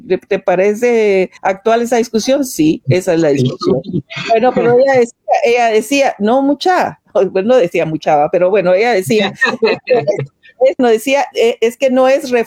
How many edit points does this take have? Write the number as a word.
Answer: two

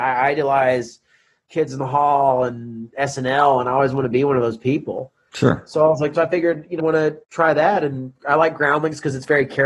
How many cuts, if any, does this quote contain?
three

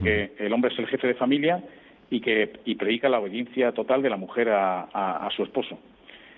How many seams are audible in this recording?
zero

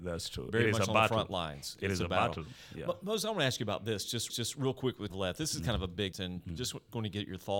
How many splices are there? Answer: three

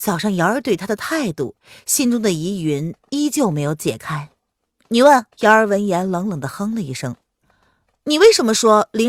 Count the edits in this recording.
two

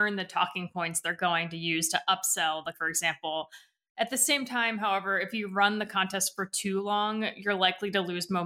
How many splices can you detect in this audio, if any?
one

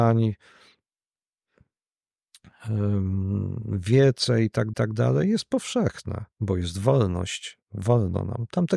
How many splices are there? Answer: three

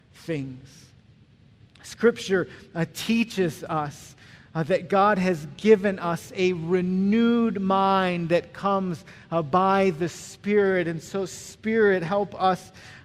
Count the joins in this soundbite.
zero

